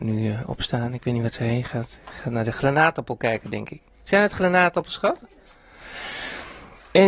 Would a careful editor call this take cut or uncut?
uncut